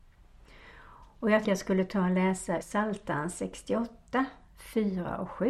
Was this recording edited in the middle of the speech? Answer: yes; 2 cuts; at 1.4 s, 2.6 s

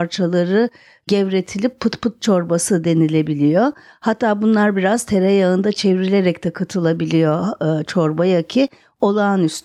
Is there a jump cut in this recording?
no; 0 cuts

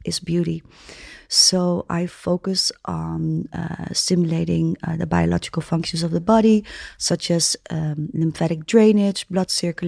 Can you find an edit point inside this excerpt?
no; 0 cuts

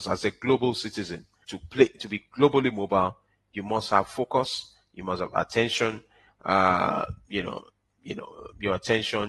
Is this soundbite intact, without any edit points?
no; 1 cut; at 1.4 s

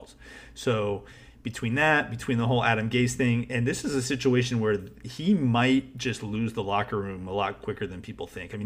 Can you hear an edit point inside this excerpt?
no; 0 cuts

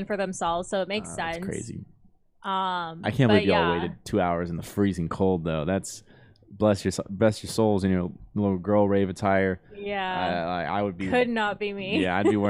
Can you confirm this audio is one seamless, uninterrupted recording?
yes; 0 cuts

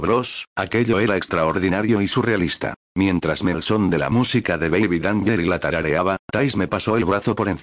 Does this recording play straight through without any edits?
no; 2 cuts; at 2.8 s, 3.5 s

